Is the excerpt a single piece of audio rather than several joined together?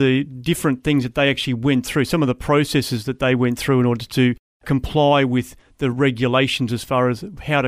yes; 0 cuts

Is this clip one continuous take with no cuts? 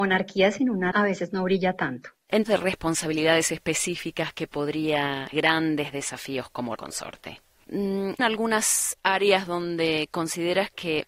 no; 5 cuts; at 0.9 s, 2.5 s, 5.3 s, 6.8 s, 8.2 s

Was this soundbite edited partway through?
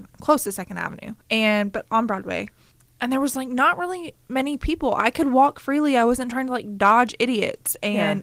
yes; 2 cuts; at 1.2 s, 2.7 s

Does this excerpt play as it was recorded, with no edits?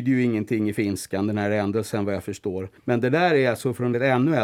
no; 1 cut; at 2.8 s

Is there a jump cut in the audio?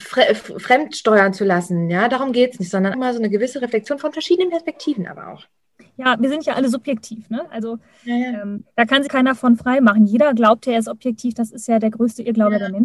yes; 2 cuts; at 2.9 s, 9.1 s

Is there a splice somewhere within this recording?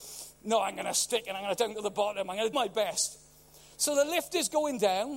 yes; 2 cuts; at 1.6 s, 2.5 s

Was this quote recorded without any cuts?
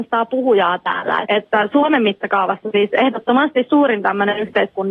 no; 1 cut; at 1.2 s

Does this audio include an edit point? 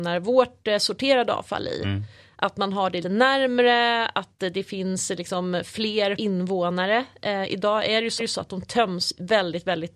yes; 3 cuts; at 3.0 s, 6.2 s, 8.2 s

